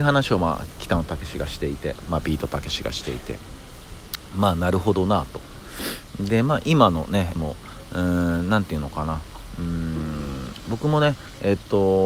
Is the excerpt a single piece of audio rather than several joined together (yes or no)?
no